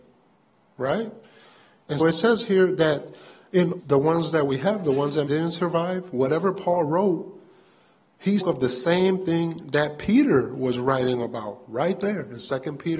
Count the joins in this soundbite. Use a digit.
4